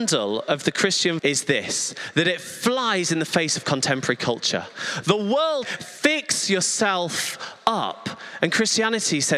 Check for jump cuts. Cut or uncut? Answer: cut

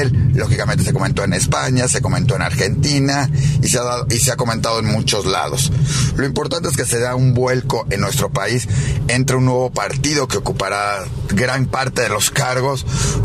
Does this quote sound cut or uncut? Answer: uncut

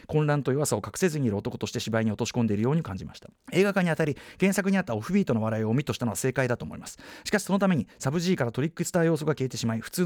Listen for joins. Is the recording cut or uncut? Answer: cut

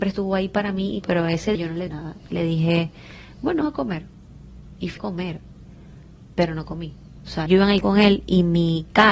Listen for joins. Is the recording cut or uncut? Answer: cut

